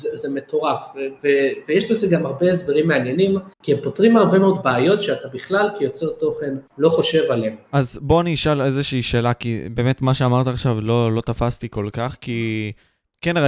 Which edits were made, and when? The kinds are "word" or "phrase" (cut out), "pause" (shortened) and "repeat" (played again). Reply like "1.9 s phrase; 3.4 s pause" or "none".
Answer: 3.5 s pause; 6.7 s pause

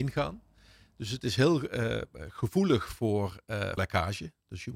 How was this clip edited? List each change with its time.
3.8 s word

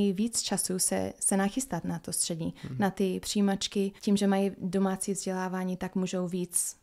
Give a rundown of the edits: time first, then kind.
4.0 s pause

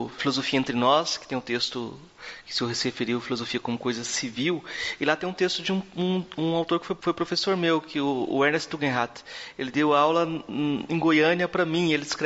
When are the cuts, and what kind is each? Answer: none

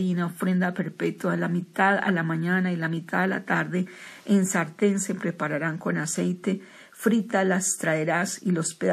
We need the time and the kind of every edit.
none

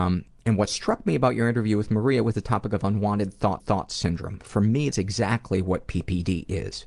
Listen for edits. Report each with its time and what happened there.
3.6 s repeat; 4.9 s word

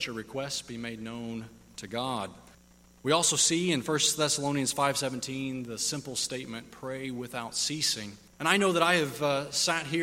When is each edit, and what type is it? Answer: 2.5 s pause; 8.3 s pause

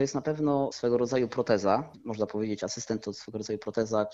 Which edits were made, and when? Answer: none

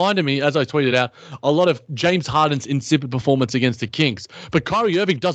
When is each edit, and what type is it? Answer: none

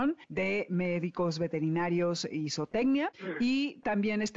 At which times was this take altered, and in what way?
none

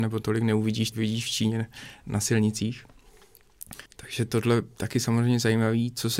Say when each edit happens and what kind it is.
0.9 s word; 3.9 s pause

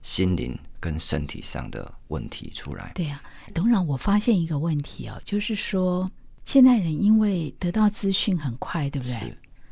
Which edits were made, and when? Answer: 3.5 s word

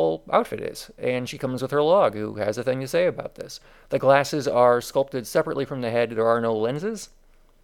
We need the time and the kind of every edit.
none

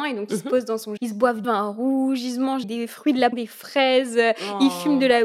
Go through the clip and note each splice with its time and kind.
1.0 s word; 1.4 s word; 2.6 s word; 3.3 s word

